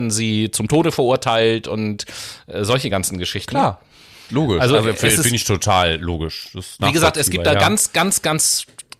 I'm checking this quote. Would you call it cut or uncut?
uncut